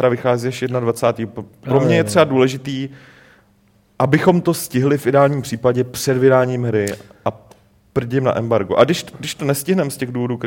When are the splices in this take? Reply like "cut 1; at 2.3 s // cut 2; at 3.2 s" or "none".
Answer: none